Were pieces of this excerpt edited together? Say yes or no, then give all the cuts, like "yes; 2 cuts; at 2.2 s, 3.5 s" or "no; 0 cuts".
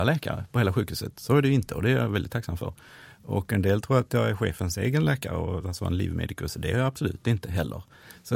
no; 0 cuts